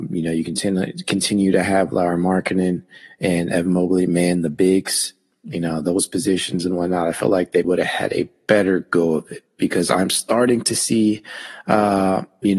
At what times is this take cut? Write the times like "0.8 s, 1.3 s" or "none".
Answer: 7.6 s

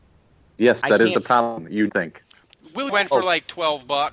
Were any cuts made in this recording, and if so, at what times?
1.9 s, 2.9 s

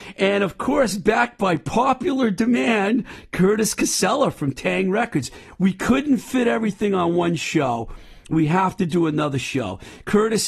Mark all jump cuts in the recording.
none

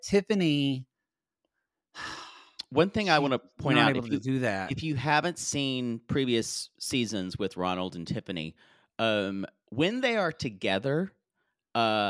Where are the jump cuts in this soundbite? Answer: none

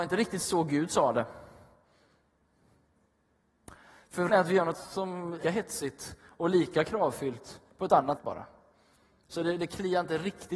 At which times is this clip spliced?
4.3 s, 4.7 s, 5.4 s, 8.2 s

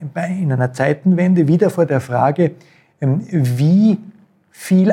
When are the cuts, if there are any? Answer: none

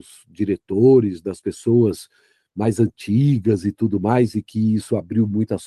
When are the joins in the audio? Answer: none

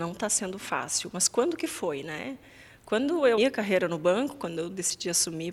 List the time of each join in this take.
3.4 s

